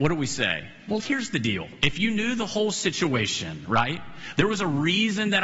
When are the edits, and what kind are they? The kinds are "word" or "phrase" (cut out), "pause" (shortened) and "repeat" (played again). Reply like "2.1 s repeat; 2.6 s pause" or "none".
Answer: 1.0 s word